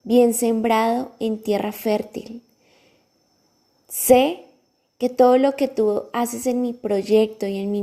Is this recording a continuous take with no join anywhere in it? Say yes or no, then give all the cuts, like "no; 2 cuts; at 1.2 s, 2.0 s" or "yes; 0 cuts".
yes; 0 cuts